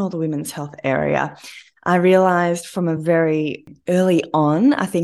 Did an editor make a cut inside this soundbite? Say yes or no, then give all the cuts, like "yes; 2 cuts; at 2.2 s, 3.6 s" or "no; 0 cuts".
no; 0 cuts